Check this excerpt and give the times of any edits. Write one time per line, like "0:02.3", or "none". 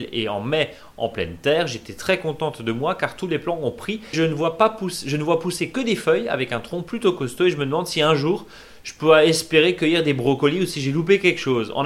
0:04.1